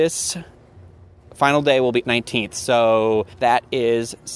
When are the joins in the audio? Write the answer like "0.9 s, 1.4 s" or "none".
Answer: 2.0 s, 3.3 s